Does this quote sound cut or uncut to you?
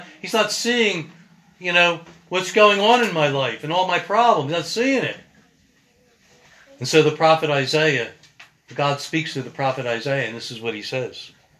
uncut